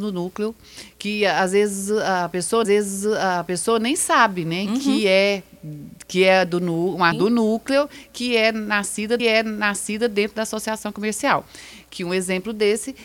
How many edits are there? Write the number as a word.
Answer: three